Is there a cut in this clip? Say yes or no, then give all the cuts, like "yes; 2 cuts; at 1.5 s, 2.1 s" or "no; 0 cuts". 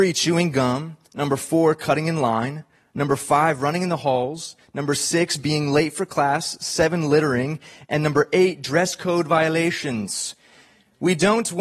no; 0 cuts